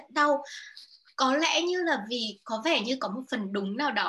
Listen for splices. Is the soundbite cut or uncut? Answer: uncut